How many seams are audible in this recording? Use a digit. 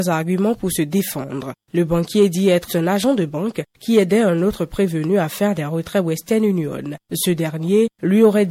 1